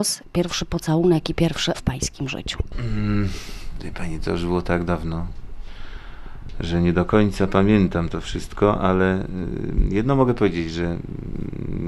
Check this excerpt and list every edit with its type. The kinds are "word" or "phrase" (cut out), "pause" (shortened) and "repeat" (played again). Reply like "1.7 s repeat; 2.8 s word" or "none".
1.7 s word